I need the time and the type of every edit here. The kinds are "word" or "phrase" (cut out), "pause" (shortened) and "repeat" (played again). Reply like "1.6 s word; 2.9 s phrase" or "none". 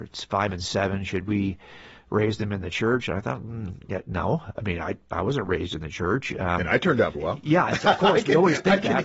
7.1 s word